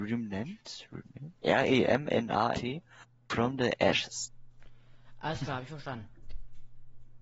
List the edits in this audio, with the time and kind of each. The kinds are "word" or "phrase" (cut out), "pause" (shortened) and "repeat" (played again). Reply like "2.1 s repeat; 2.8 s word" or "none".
1.4 s pause; 2.5 s word